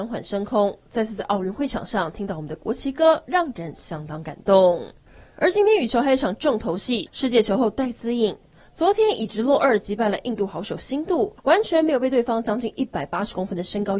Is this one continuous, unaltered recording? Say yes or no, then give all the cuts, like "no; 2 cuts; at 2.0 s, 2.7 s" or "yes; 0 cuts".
no; 1 cut; at 11.4 s